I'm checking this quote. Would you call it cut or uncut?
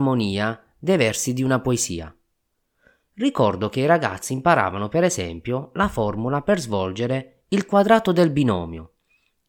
uncut